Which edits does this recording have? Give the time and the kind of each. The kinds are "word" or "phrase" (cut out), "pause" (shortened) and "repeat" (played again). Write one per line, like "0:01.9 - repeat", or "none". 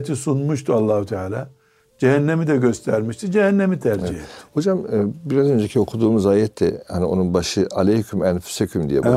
none